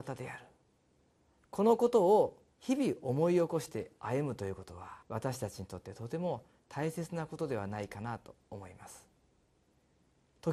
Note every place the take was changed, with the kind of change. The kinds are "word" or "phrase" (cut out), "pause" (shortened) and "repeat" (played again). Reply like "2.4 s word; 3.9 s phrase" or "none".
2.5 s pause; 5.0 s pause